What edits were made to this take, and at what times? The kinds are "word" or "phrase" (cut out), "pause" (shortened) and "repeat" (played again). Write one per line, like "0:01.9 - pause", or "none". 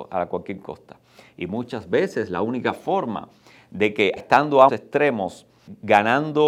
0:04.2 - word
0:04.7 - word